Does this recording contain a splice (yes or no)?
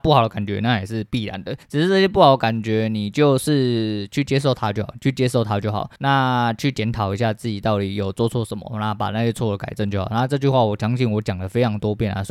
yes